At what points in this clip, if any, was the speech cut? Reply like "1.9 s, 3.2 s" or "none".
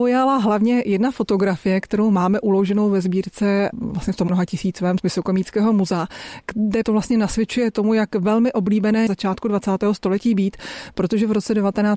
4.3 s, 5.0 s, 6.8 s, 9.1 s

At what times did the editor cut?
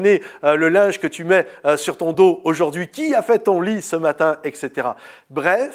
none

